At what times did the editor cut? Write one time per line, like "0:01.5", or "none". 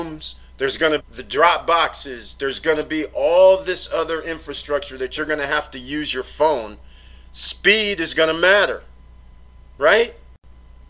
0:01.0